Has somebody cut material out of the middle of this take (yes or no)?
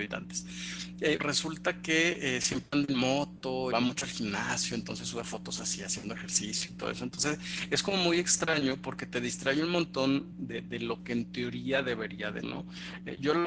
yes